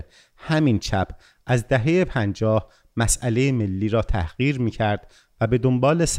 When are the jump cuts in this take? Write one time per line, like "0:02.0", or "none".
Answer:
none